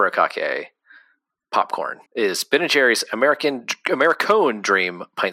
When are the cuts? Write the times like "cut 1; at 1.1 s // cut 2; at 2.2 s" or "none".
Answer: cut 1; at 2.1 s